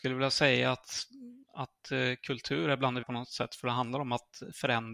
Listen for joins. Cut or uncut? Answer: cut